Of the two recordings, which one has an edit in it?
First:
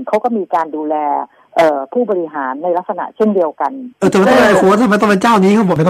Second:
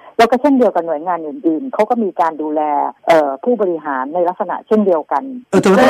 second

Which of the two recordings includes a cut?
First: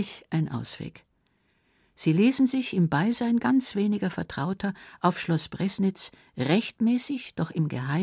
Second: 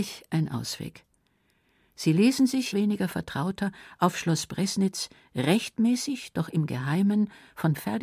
second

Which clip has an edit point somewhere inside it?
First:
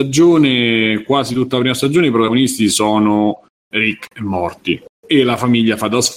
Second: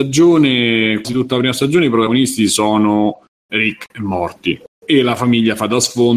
second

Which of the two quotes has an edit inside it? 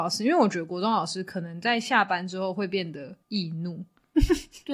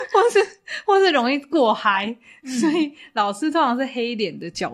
first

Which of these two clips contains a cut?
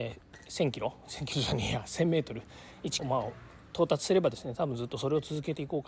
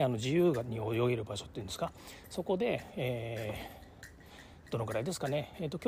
first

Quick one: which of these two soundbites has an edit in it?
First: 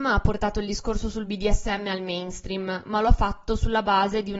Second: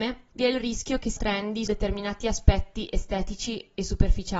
second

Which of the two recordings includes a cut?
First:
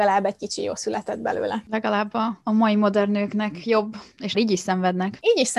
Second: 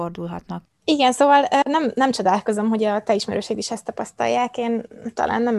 first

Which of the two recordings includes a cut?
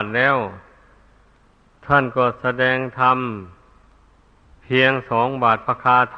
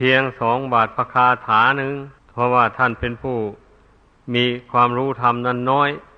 second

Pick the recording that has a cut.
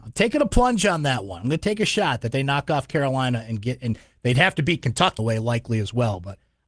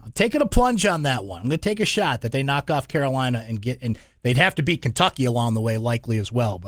first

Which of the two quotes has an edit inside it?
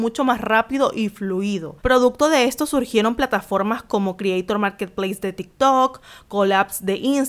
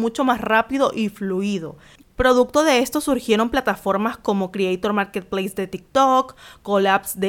first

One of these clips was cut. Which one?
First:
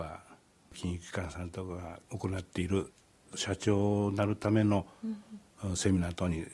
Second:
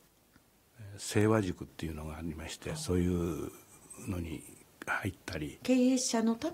first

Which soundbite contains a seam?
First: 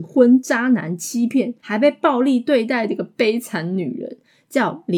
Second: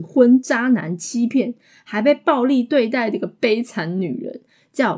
first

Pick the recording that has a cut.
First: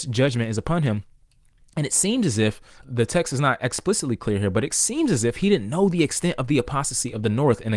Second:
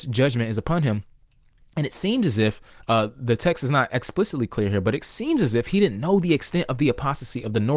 first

